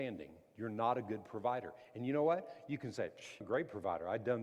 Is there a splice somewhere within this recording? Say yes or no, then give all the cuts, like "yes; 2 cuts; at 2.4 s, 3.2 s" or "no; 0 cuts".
yes; 1 cut; at 3.4 s